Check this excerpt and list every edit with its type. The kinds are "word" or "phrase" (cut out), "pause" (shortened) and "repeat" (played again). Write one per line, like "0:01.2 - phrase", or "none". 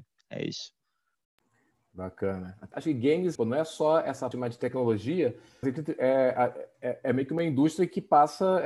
0:02.7 - word
0:03.4 - word
0:04.3 - word
0:05.6 - word
0:06.7 - pause